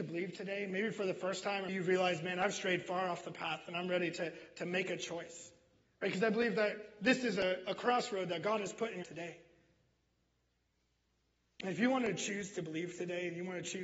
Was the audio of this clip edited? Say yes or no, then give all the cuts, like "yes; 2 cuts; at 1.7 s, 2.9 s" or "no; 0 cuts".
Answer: yes; 2 cuts; at 1.7 s, 9.0 s